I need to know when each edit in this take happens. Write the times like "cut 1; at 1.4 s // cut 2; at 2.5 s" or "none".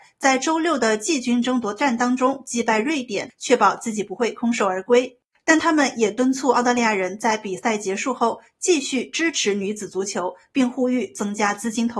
cut 1; at 5.3 s